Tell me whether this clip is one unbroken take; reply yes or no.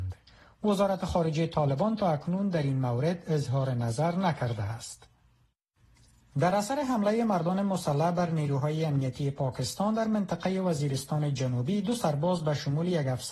yes